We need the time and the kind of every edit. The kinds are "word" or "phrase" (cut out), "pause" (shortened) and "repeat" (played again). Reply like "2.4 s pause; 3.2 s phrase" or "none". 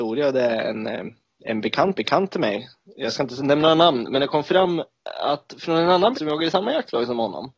2.0 s repeat; 6.1 s word